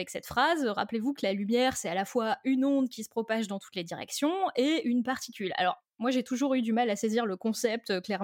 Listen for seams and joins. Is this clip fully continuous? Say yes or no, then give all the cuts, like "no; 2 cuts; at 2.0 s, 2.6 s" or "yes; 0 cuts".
yes; 0 cuts